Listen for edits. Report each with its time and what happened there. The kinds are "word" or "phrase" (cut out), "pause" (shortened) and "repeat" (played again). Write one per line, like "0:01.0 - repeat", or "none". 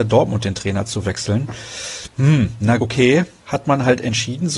0:02.8 - word